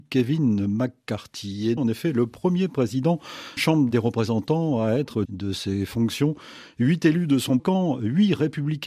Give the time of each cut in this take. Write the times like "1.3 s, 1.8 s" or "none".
1.8 s, 3.6 s, 5.2 s, 7.6 s